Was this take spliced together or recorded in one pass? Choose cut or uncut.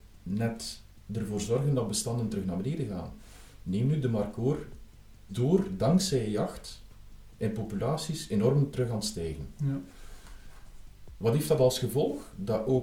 cut